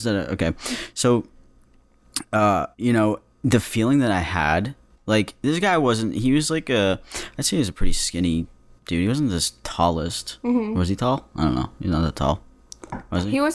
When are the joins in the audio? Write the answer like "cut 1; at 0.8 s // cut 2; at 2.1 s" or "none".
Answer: cut 1; at 2.7 s

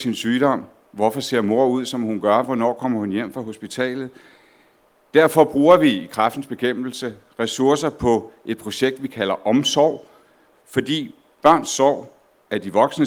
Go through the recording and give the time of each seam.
none

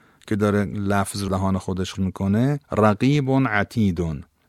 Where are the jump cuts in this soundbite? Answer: cut 1; at 1.3 s // cut 2; at 1.9 s // cut 3; at 2.6 s

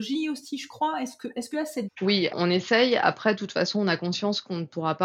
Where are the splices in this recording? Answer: cut 1; at 1.5 s // cut 2; at 1.8 s // cut 3; at 2.3 s

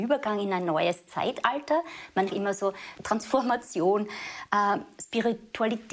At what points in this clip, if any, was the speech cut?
cut 1; at 2.3 s

